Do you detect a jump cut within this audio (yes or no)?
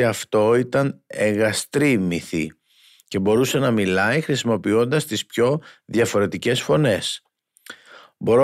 no